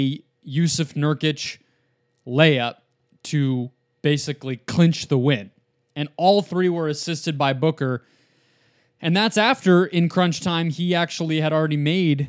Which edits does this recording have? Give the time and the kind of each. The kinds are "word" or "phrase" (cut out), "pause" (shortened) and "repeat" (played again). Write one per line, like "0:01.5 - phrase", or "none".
none